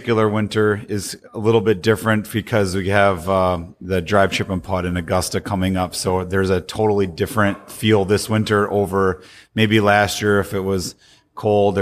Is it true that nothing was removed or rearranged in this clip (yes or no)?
yes